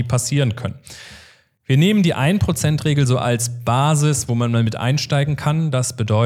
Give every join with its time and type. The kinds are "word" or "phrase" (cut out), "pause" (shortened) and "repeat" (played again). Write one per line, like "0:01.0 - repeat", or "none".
none